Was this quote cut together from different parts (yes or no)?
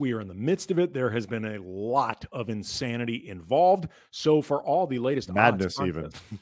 no